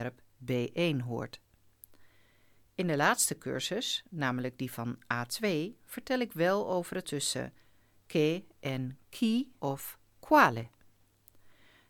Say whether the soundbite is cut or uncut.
cut